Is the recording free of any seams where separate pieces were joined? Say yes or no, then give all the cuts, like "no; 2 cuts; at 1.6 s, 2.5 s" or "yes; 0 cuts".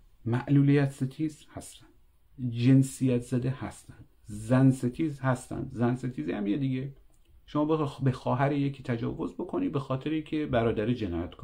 yes; 0 cuts